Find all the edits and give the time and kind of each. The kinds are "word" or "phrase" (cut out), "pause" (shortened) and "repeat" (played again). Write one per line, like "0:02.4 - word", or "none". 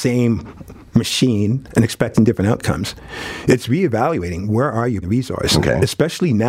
0:05.0 - word